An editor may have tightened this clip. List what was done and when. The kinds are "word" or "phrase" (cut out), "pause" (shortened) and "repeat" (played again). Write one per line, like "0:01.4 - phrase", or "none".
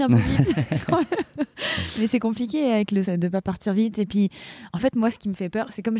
0:03.0 - word